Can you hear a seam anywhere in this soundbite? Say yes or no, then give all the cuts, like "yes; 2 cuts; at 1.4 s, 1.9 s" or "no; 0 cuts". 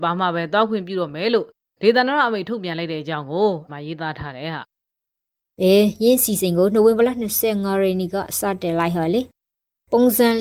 yes; 1 cut; at 3.7 s